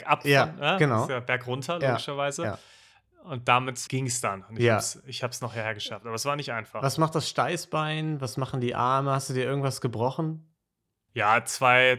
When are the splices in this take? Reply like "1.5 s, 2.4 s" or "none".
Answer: 3.9 s